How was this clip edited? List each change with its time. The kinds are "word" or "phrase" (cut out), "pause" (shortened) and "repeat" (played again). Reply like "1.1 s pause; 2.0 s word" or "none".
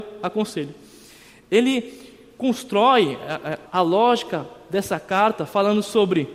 2.3 s word; 3.7 s word